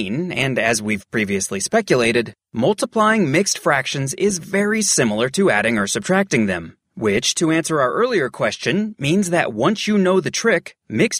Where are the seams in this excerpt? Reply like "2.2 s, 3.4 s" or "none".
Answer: none